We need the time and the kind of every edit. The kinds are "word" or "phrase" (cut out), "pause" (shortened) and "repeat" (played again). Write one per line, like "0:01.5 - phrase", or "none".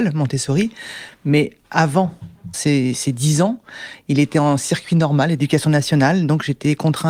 0:02.5 - word